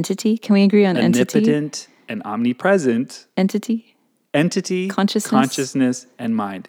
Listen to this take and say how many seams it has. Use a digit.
0